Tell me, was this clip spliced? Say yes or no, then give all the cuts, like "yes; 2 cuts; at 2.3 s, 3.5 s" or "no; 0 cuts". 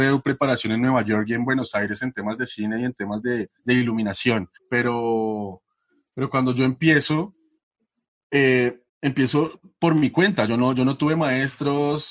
yes; 3 cuts; at 3.6 s, 4.6 s, 8.9 s